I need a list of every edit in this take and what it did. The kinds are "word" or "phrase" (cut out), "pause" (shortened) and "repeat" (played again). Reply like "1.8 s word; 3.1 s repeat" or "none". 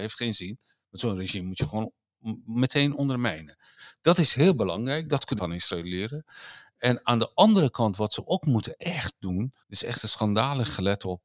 5.4 s word; 9.6 s pause